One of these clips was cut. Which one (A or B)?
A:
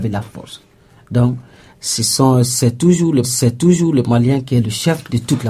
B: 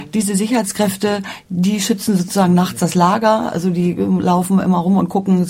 A